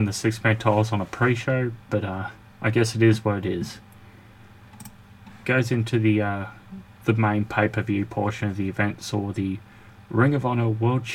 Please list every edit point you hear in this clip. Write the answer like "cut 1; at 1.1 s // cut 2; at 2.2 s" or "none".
cut 1; at 2.5 s

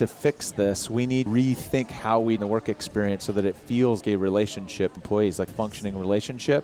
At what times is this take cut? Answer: cut 1; at 1.3 s // cut 2; at 2.4 s // cut 3; at 4.0 s // cut 4; at 5.0 s // cut 5; at 5.5 s

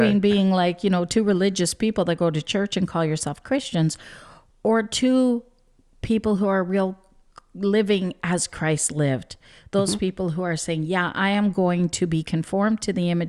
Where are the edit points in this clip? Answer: none

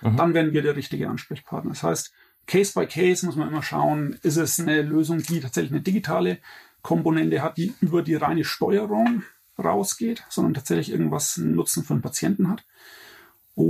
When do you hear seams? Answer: none

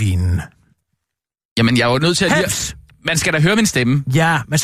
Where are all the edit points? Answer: none

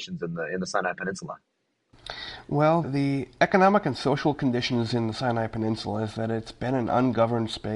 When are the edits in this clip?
cut 1; at 2.8 s

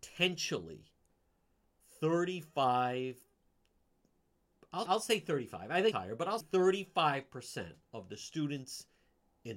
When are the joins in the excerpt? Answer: cut 1; at 4.9 s // cut 2; at 5.9 s // cut 3; at 6.4 s

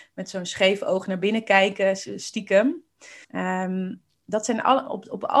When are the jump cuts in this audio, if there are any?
cut 1; at 3.2 s

